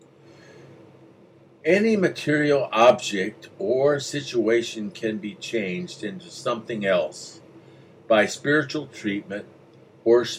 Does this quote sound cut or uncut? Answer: uncut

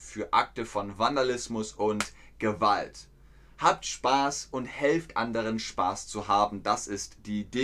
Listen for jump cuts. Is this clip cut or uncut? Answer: uncut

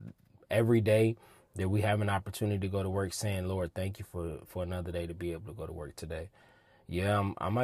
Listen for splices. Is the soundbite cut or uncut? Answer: uncut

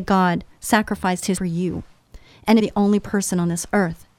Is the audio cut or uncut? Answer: cut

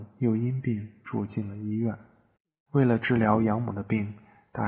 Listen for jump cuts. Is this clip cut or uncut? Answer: uncut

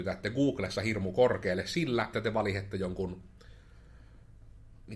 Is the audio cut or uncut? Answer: cut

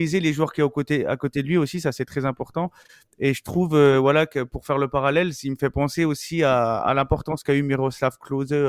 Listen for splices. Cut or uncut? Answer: uncut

